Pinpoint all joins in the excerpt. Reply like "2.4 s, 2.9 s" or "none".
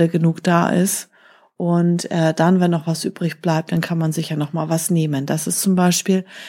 none